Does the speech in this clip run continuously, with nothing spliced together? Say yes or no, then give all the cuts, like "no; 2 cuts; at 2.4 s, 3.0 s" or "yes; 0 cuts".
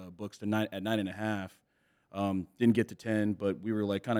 yes; 0 cuts